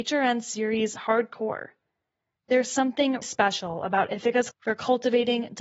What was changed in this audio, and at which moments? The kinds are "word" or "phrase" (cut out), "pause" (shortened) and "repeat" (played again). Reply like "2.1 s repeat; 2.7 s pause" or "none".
3.2 s word; 4.5 s word